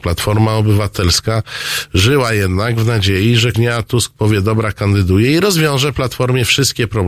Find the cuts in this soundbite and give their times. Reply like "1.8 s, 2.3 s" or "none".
3.5 s